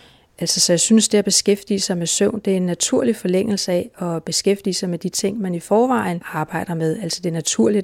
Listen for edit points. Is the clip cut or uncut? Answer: uncut